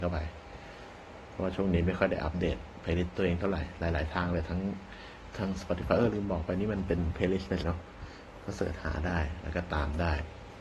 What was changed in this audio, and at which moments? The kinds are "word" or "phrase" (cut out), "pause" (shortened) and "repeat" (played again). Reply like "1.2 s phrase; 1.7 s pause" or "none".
5.3 s word; 7.6 s word